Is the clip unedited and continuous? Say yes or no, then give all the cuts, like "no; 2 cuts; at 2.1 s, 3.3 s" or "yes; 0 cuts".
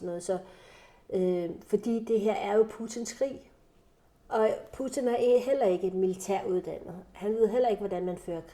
no; 1 cut; at 4.0 s